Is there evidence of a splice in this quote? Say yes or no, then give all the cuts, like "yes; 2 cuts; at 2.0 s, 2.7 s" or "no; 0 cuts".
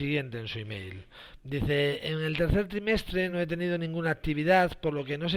no; 0 cuts